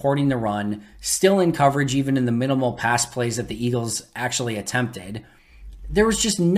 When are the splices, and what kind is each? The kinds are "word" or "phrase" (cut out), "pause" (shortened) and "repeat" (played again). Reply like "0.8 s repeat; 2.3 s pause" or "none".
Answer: none